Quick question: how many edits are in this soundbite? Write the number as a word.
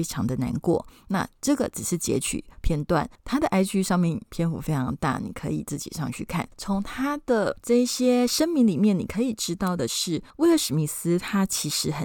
one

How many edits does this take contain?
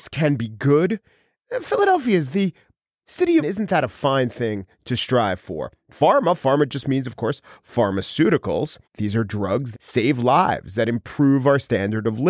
three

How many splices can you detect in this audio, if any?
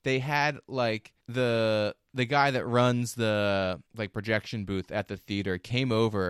two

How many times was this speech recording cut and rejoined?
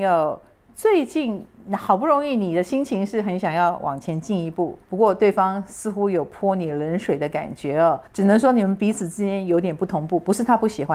two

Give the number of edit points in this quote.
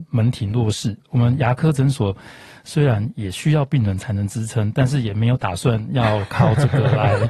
zero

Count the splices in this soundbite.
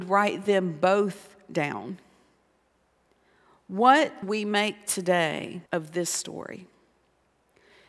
two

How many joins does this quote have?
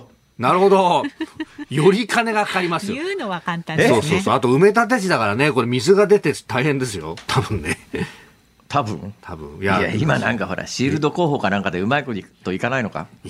zero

